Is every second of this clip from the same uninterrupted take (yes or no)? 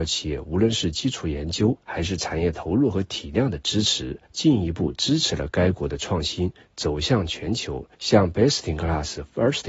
no